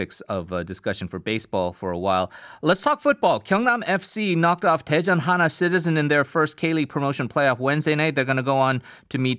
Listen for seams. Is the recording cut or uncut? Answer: uncut